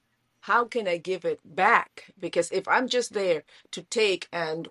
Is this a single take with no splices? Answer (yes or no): yes